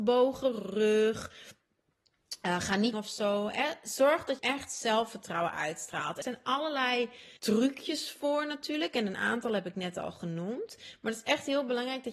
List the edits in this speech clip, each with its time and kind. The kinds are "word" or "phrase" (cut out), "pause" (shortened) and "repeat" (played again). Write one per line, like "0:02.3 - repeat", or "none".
0:02.9 - phrase
0:04.4 - word
0:06.2 - word
0:07.4 - pause